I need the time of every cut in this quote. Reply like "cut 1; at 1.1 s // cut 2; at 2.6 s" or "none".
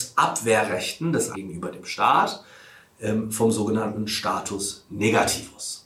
cut 1; at 1.3 s

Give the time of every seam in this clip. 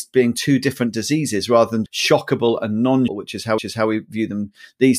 cut 1; at 1.9 s // cut 2; at 3.1 s // cut 3; at 3.6 s

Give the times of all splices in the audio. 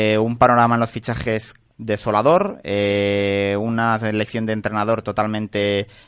none

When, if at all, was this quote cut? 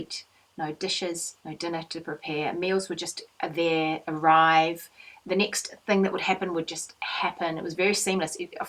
cut 1; at 1.4 s

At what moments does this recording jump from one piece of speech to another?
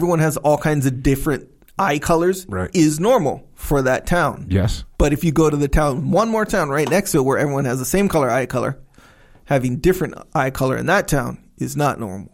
cut 1; at 4.9 s

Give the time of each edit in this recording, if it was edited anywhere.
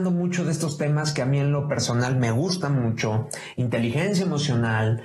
none

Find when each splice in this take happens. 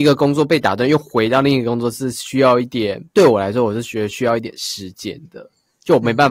cut 1; at 3.1 s

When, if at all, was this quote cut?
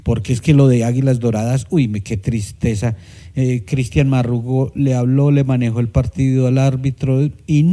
none

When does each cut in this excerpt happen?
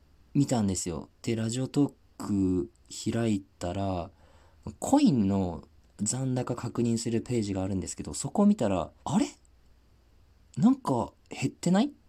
cut 1; at 3.5 s // cut 2; at 9.0 s

